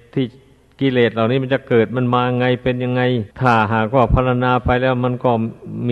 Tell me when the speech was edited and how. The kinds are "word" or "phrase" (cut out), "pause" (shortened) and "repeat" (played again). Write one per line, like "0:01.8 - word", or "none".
0:03.3 - pause